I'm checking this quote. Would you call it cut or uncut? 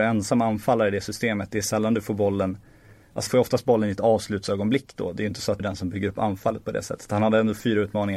cut